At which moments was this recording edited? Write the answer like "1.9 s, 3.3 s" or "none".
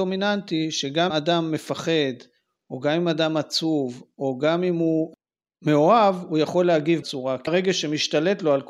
1.1 s, 7.0 s, 7.5 s

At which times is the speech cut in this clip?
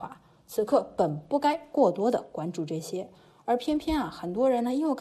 none

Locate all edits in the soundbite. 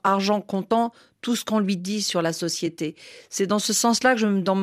none

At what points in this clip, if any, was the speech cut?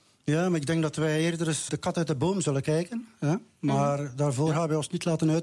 1.7 s

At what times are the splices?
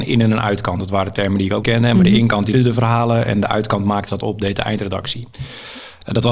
1.6 s, 2.5 s

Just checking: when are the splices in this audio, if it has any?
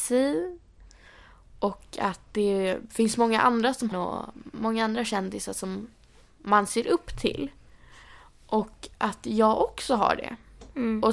3.9 s

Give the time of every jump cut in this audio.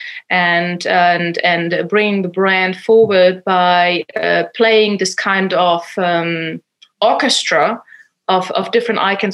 none

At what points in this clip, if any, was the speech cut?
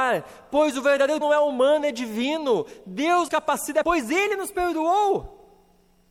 1.2 s, 3.3 s, 3.8 s

